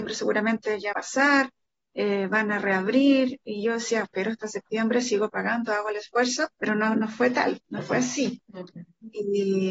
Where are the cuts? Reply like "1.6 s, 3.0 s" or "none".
0.9 s, 4.0 s, 6.5 s, 7.6 s